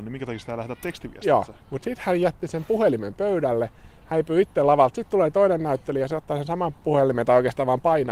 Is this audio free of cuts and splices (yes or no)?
no